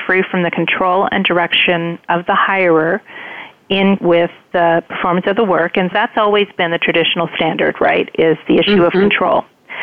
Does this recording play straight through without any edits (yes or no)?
no